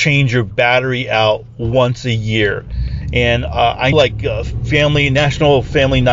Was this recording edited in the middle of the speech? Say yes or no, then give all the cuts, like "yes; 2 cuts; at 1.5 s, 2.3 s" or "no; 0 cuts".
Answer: yes; 1 cut; at 3.9 s